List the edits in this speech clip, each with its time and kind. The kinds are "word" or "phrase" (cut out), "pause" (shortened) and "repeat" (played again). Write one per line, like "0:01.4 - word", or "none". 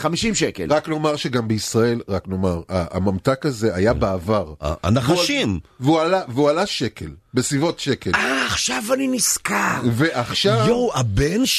none